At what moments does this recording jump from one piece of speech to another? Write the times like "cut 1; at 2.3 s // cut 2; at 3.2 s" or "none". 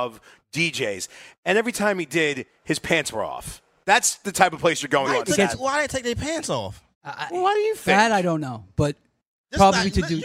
cut 1; at 5.0 s // cut 2; at 5.5 s // cut 3; at 6.9 s